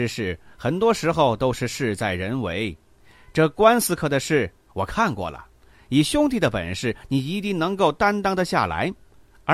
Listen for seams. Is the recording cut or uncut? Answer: uncut